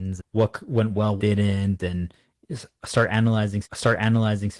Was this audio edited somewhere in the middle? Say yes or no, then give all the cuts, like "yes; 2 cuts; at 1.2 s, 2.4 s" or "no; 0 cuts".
yes; 2 cuts; at 1.2 s, 3.6 s